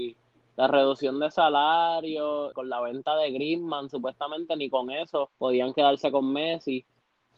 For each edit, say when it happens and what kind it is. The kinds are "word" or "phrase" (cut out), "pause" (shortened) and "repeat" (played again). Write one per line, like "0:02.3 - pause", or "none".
0:02.5 - word
0:05.3 - pause